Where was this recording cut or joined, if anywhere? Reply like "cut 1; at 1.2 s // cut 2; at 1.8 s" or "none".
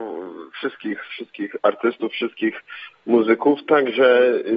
none